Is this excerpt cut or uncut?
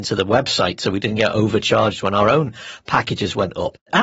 uncut